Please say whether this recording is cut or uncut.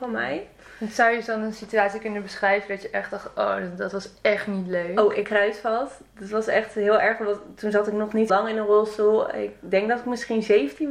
cut